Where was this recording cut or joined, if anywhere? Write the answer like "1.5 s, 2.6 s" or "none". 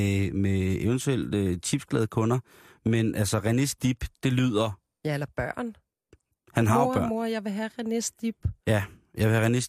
none